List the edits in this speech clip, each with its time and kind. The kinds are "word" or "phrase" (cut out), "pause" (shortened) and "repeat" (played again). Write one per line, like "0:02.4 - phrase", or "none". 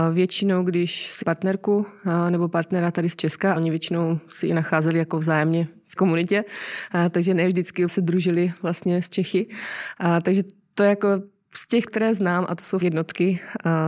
0:01.2 - word
0:03.6 - word
0:06.0 - word
0:07.9 - word
0:11.9 - word
0:12.8 - word